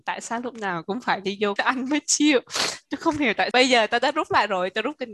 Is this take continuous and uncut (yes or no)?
no